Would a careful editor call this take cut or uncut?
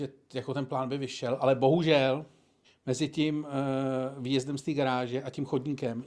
cut